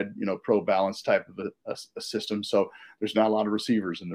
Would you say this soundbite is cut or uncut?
uncut